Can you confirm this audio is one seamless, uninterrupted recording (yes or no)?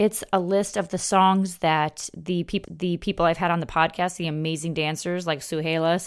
no